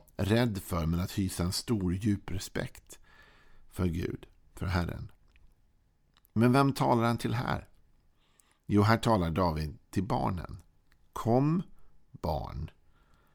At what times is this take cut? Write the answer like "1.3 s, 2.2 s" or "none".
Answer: none

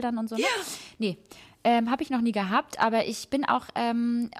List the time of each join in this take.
none

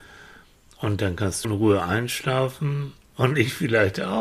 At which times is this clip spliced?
1.4 s

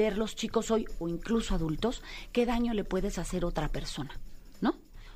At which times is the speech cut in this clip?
1.5 s

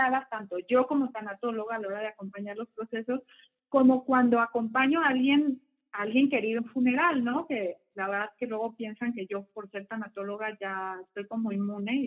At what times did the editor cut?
6.6 s

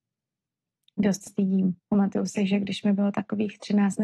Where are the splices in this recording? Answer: 1.3 s, 1.8 s

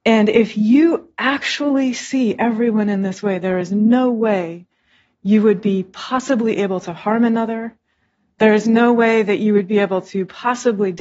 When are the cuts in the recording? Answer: none

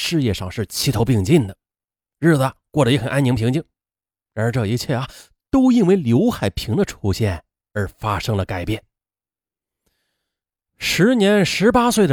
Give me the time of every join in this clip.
none

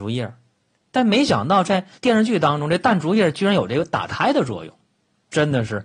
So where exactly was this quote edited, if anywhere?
2.0 s

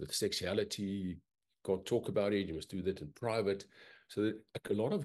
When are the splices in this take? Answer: none

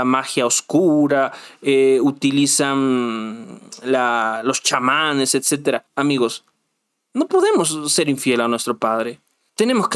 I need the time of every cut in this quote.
5.9 s

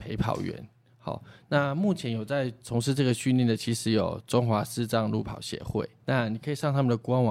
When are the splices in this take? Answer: 6.0 s

